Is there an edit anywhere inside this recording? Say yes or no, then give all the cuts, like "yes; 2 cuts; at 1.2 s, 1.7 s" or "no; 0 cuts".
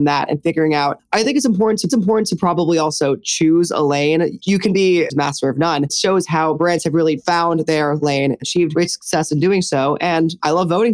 yes; 4 cuts; at 1.9 s, 5.1 s, 5.9 s, 8.4 s